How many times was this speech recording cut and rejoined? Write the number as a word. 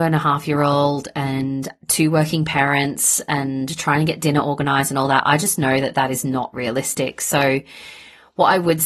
zero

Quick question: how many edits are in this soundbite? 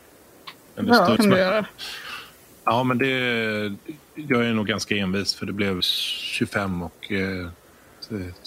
two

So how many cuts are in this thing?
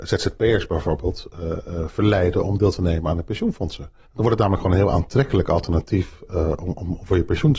one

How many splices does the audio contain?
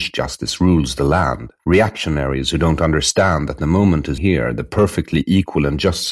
two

